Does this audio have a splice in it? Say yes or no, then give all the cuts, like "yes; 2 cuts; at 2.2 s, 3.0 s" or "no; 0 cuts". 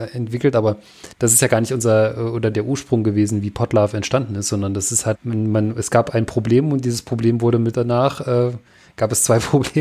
yes; 4 cuts; at 1.1 s, 2.5 s, 5.2 s, 7.7 s